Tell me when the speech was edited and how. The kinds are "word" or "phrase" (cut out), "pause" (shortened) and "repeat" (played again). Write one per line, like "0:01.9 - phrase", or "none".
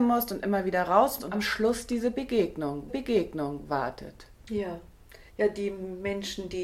0:01.2 - word
0:02.9 - repeat
0:05.3 - pause